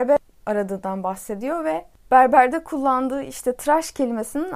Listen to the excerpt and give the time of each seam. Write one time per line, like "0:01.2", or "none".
none